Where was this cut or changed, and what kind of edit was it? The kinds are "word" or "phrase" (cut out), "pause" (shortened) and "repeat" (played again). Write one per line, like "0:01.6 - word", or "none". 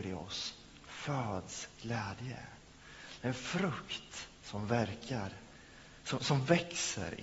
0:04.4 - pause